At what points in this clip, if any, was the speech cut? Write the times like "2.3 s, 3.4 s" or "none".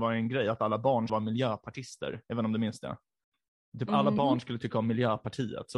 1.1 s